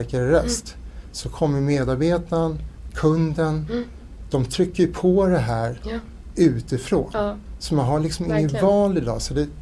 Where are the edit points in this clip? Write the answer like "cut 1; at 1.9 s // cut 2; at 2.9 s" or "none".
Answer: none